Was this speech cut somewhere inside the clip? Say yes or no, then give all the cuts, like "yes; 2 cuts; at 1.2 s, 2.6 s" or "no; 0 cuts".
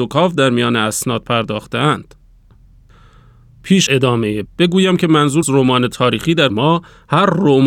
yes; 4 cuts; at 3.9 s, 4.5 s, 5.4 s, 6.5 s